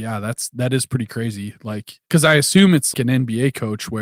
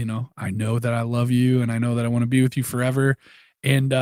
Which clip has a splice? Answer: first; 2 cuts; at 2.0 s, 2.9 s

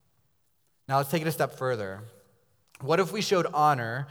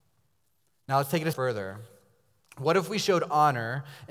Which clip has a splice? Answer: second; 1 cut; at 1.3 s

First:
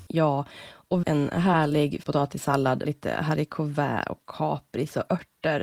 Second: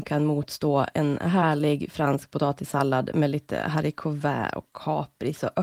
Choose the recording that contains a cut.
first; 3 cuts; at 1.0 s, 2.0 s, 2.8 s

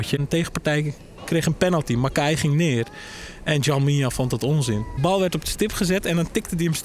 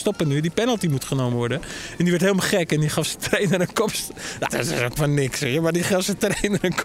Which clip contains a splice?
second; 2 cuts; at 4.5 s, 5.0 s

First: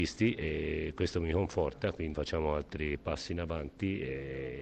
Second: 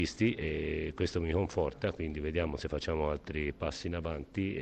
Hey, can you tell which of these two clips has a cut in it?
first; 1 cut; at 2.1 s

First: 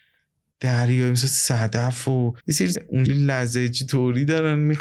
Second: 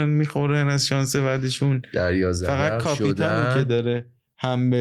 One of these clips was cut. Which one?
first; 3 cuts; at 2.4 s, 2.7 s, 3.1 s

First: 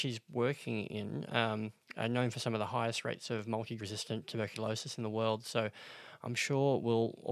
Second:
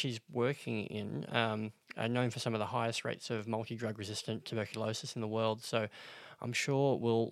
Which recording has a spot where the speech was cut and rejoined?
first; 1 cut; at 3.8 s

